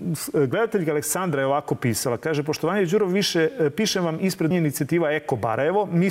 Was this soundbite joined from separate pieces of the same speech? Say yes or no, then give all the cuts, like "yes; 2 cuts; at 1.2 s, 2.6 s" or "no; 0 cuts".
yes; 1 cut; at 4.5 s